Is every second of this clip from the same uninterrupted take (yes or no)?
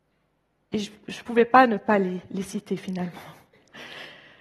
yes